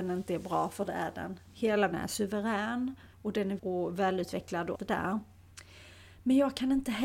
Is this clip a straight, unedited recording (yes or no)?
no